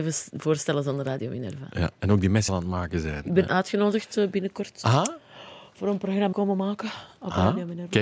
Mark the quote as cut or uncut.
cut